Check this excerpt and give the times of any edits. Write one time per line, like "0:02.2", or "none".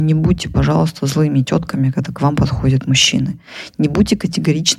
none